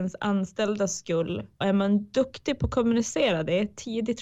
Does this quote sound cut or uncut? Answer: cut